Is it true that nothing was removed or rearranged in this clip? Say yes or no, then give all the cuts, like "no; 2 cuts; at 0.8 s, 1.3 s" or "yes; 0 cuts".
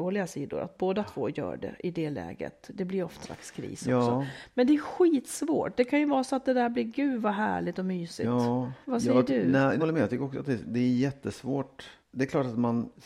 no; 4 cuts; at 3.2 s, 8.8 s, 9.8 s, 12.0 s